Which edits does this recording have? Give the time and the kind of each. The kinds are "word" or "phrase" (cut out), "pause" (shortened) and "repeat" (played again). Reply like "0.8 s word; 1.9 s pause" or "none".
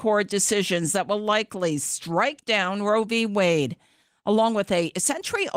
none